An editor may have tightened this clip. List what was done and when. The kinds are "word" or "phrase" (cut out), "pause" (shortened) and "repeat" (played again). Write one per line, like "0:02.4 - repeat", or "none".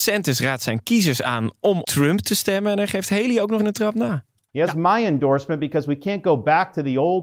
0:01.8 - word
0:03.6 - word